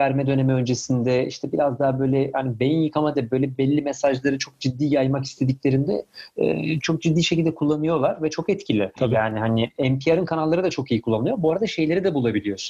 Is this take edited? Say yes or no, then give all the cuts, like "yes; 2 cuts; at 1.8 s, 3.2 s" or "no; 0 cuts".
yes; 3 cuts; at 3.1 s, 3.5 s, 6.8 s